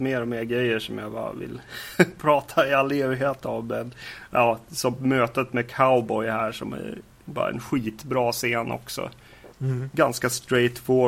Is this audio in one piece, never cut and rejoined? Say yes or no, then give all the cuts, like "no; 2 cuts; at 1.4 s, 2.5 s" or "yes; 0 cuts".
yes; 0 cuts